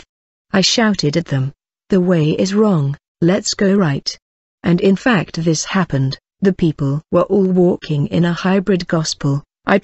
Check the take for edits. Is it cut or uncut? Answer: uncut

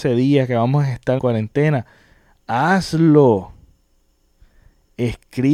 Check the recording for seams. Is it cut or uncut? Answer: cut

